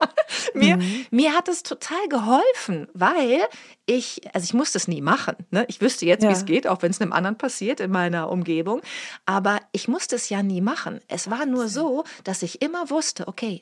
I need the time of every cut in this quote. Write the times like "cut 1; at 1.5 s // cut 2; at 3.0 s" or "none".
none